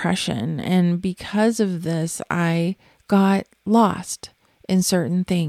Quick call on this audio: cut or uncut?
uncut